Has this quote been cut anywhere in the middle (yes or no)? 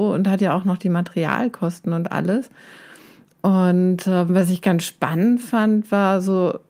no